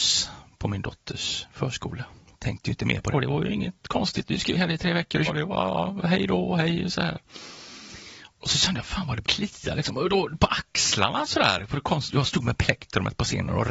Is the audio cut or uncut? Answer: cut